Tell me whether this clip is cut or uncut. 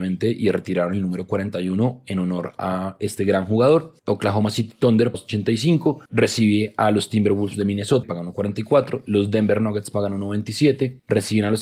cut